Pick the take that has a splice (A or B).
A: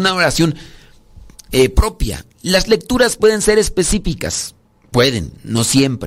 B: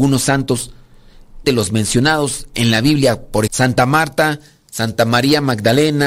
B